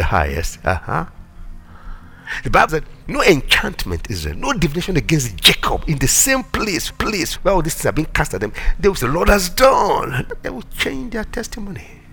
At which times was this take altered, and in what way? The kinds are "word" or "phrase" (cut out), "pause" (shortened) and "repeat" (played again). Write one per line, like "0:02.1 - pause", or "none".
0:02.7 - word
0:04.1 - word
0:06.9 - repeat
0:09.0 - phrase